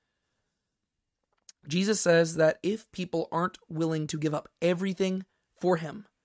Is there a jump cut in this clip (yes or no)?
no